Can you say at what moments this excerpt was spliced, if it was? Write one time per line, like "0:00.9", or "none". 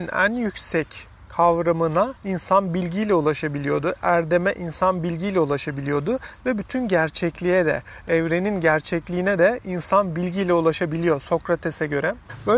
0:02.2